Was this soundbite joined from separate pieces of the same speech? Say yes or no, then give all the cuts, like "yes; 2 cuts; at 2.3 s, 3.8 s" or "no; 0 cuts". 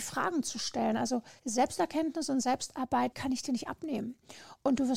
yes; 2 cuts; at 1.4 s, 3.1 s